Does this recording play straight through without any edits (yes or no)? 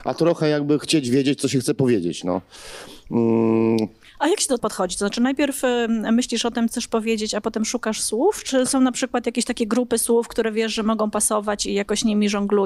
no